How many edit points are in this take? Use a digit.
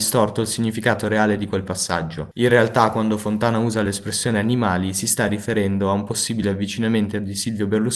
0